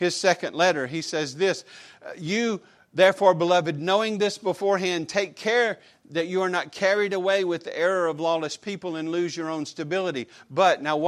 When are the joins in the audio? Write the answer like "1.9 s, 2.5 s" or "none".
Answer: none